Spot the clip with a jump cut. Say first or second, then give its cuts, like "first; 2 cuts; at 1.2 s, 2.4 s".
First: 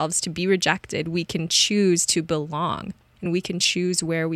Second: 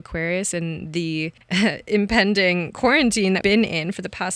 second; 2 cuts; at 1.4 s, 3.4 s